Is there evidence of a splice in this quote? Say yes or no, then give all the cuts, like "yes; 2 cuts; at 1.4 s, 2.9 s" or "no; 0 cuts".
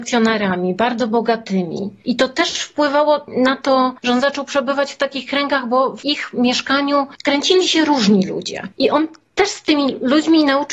no; 0 cuts